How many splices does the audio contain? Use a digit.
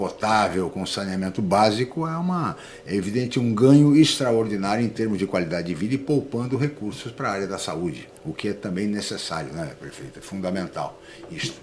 1